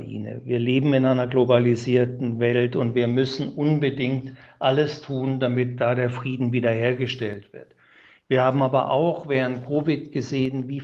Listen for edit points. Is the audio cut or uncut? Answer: uncut